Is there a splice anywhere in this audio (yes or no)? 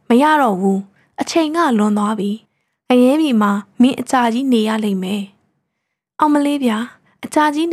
yes